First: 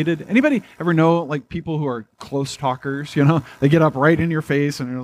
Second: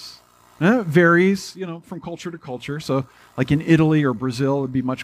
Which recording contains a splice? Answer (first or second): first